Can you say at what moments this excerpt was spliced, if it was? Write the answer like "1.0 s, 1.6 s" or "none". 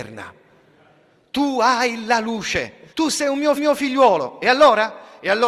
2.9 s, 3.6 s